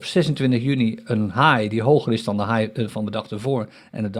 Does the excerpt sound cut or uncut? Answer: uncut